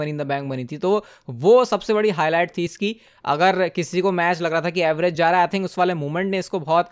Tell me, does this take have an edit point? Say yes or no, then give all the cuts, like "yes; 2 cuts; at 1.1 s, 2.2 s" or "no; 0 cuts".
no; 0 cuts